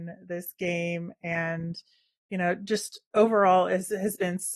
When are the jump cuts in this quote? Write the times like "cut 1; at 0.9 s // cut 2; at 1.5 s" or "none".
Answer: none